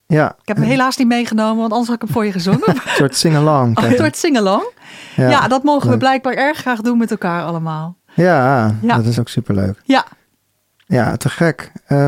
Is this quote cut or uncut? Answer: cut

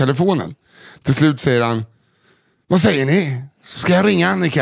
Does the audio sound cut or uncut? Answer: uncut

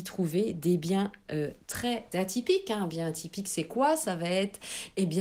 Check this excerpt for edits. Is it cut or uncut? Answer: cut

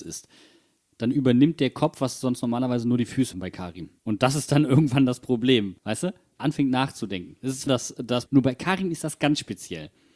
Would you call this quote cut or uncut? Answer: cut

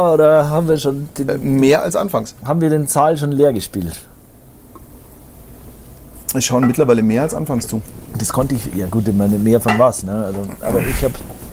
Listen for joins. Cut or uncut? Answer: cut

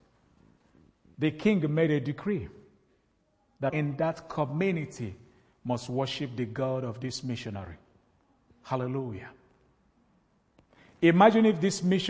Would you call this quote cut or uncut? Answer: cut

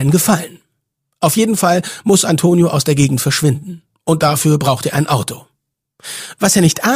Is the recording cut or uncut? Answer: uncut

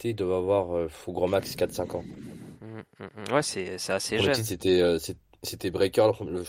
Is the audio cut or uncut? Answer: uncut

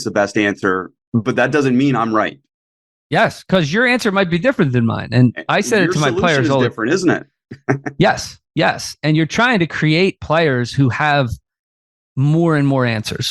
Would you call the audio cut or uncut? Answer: uncut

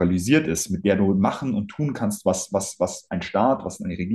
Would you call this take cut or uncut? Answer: uncut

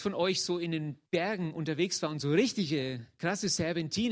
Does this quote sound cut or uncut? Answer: cut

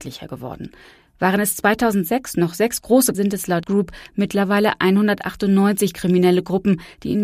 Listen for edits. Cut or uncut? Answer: cut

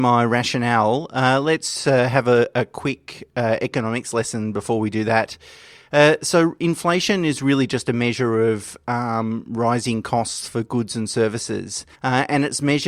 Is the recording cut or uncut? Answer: cut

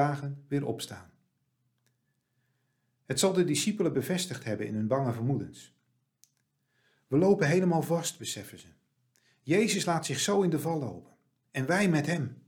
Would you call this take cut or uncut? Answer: uncut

